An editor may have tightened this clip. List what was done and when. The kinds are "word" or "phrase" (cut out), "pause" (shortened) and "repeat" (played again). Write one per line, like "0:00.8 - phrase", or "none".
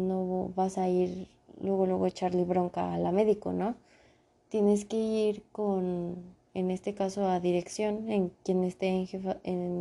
none

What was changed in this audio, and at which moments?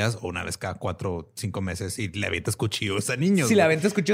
none

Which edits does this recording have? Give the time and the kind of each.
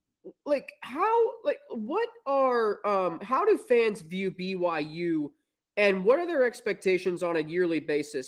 none

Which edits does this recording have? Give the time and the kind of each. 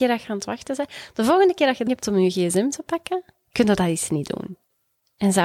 0:01.9 - word

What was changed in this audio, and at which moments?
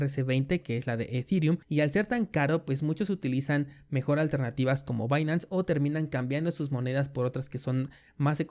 0:01.6 - pause

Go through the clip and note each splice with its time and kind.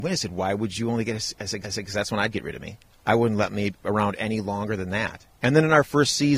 0:01.6 - repeat
0:02.9 - pause

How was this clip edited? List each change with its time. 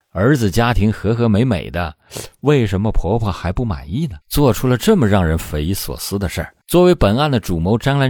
0:04.2 - pause
0:06.6 - pause

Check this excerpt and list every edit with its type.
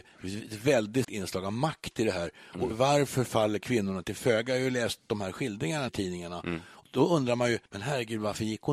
0:01.0 - word
0:02.7 - word
0:05.9 - word
0:06.8 - word
0:07.7 - pause

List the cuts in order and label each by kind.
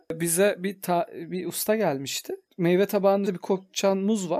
0:03.2 - word

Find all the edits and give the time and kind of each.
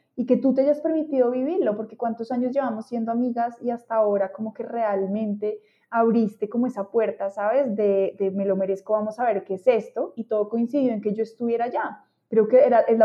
none

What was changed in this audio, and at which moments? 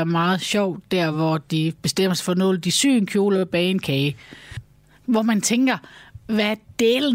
none

